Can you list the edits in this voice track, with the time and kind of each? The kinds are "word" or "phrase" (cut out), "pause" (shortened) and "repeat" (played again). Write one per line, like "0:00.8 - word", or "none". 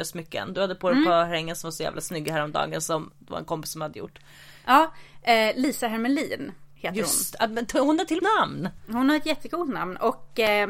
0:08.2 - phrase